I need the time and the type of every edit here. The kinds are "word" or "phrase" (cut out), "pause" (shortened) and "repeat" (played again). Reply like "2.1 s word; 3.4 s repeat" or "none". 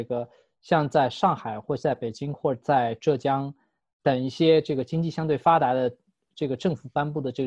none